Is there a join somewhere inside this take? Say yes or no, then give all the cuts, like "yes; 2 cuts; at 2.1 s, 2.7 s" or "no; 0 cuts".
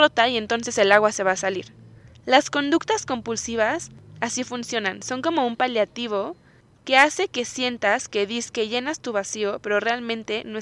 no; 0 cuts